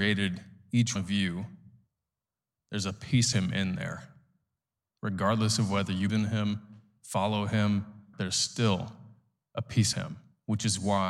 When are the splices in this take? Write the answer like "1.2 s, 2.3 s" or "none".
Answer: 1.0 s, 3.3 s, 6.1 s, 8.1 s, 9.9 s